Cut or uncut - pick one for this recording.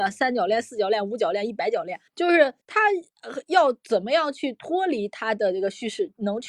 cut